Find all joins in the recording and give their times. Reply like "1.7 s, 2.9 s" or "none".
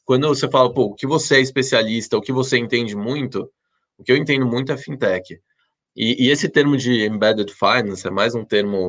none